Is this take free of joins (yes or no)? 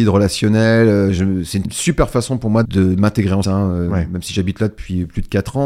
no